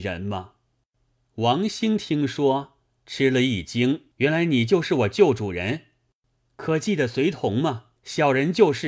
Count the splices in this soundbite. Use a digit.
2